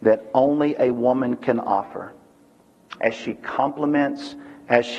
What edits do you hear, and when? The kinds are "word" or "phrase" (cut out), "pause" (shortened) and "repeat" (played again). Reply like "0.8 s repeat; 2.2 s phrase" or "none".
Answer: none